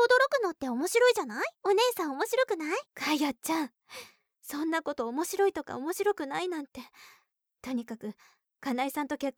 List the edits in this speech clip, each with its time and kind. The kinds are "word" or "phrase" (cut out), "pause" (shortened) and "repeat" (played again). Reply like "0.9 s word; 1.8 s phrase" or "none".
1.6 s pause; 2.9 s pause